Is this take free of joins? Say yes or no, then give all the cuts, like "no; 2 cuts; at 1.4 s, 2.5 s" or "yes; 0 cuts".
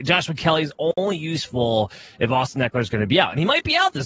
yes; 0 cuts